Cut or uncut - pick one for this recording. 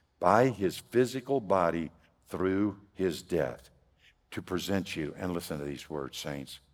uncut